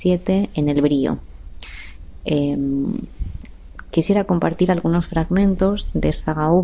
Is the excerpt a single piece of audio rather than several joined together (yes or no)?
yes